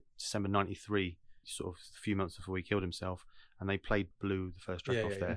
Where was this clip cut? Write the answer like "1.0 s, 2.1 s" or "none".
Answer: 1.4 s, 4.1 s